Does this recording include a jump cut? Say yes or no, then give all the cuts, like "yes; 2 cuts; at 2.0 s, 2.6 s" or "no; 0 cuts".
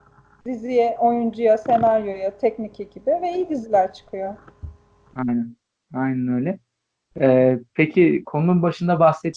no; 0 cuts